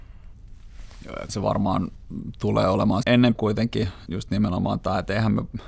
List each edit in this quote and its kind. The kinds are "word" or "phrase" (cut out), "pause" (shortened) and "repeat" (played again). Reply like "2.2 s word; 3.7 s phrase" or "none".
1.3 s word; 3.0 s word; 3.3 s word; 4.1 s word